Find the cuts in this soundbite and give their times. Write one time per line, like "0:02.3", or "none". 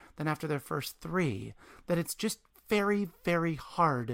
none